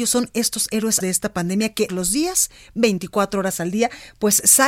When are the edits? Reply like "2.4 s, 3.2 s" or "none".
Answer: 1.0 s, 1.9 s